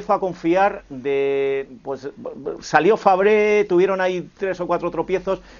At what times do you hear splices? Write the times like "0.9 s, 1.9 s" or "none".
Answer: none